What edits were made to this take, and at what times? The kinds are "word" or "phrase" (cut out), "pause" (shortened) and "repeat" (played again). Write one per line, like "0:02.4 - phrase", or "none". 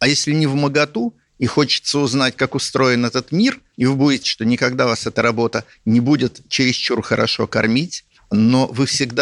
0:04.2 - word